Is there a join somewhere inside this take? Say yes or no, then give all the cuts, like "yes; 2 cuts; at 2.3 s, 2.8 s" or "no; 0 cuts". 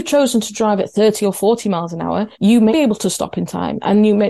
yes; 2 cuts; at 2.3 s, 2.7 s